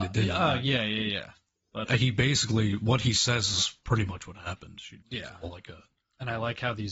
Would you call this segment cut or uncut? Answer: cut